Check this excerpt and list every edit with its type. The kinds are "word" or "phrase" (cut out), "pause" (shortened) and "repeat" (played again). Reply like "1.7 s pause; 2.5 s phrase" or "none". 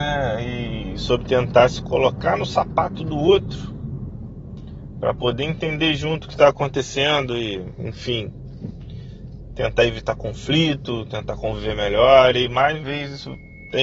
12.8 s word